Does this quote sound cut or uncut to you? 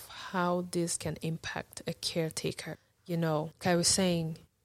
cut